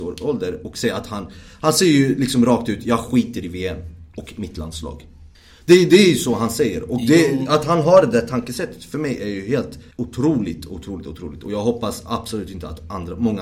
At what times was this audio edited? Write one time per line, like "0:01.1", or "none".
0:05.3
0:09.9

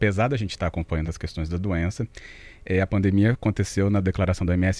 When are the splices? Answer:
none

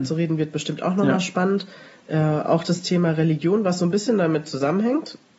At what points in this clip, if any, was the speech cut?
none

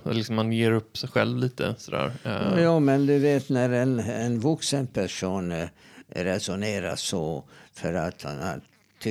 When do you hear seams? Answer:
none

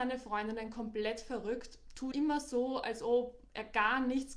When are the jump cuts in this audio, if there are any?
0:02.1

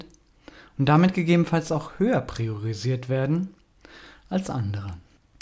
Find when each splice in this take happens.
none

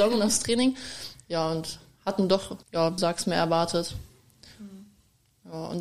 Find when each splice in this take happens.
0:02.6
0:03.0

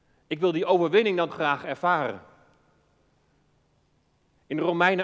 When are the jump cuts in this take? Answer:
0:01.3

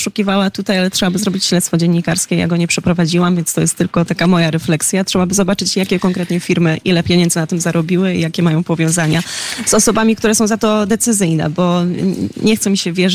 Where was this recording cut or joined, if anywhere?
0:04.1

